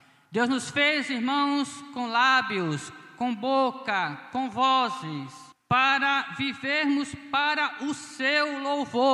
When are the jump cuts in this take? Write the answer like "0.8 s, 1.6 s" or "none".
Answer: 5.5 s